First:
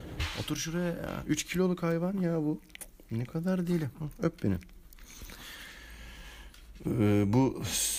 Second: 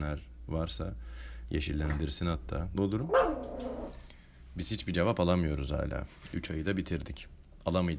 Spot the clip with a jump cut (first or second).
second